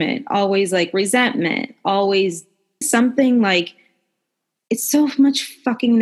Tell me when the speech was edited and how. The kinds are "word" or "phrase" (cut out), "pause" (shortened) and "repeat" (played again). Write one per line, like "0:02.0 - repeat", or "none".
0:02.8 - word